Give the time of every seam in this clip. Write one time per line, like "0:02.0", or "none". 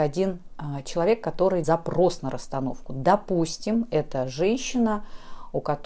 0:01.6